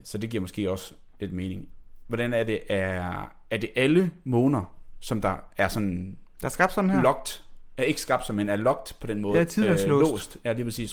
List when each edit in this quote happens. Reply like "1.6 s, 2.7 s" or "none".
none